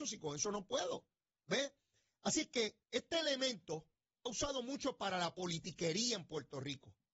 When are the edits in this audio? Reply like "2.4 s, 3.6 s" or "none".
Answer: 2.8 s, 4.3 s